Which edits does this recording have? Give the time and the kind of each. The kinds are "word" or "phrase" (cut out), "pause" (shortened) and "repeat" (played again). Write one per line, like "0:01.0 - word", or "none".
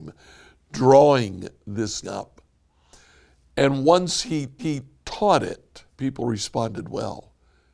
0:02.0 - word
0:04.6 - repeat
0:05.9 - pause